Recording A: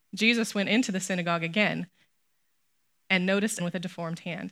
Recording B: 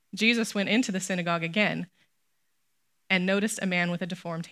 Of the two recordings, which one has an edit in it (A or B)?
A